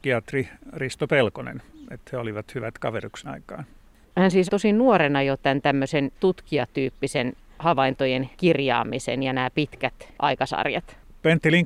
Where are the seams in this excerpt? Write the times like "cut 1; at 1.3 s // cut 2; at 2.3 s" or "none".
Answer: cut 1; at 3.2 s // cut 2; at 4.5 s // cut 3; at 6.1 s // cut 4; at 8.3 s

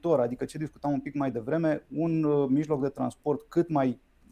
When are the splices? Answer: none

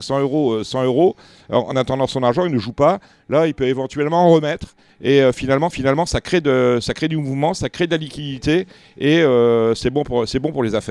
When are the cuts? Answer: cut 1; at 5.7 s

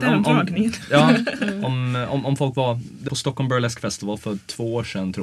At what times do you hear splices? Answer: cut 1; at 3.1 s

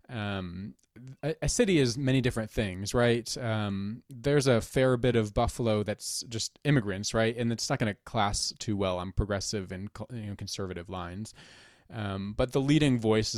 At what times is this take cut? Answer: none

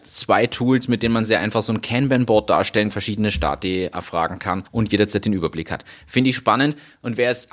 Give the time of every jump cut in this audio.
cut 1; at 2.9 s // cut 2; at 4.7 s

